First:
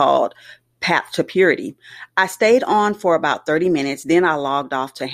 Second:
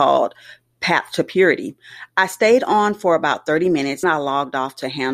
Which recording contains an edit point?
second; 1 cut; at 4.0 s

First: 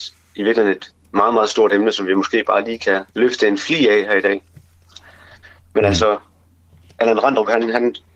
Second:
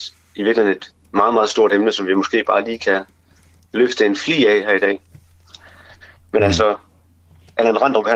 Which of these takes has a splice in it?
first; 1 cut; at 3.1 s

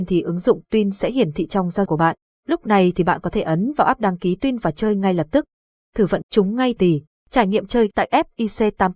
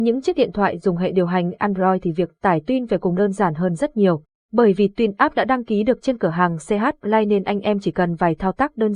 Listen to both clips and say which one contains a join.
first; 4 cuts; at 1.9 s, 6.2 s, 6.8 s, 7.9 s

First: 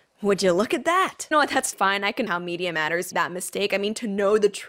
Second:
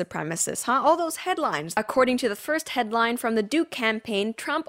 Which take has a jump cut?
first; 4 cuts; at 1.3 s, 1.7 s, 2.3 s, 3.1 s

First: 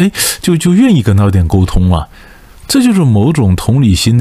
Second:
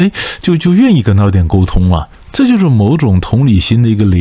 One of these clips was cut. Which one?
second; 1 cut; at 2.1 s

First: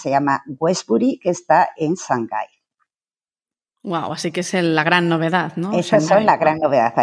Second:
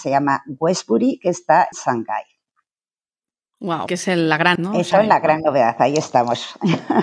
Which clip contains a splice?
second; 4 cuts; at 1.7 s, 3.9 s, 4.6 s, 4.9 s

